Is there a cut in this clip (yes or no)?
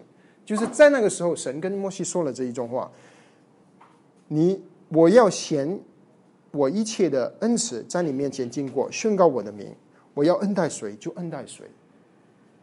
no